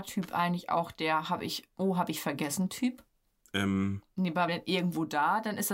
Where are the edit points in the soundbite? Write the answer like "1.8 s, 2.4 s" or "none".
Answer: 3.2 s, 4.5 s